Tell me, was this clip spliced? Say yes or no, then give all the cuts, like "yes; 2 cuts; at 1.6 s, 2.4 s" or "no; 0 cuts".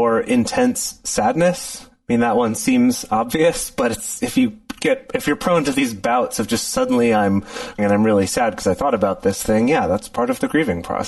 yes; 1 cut; at 7.8 s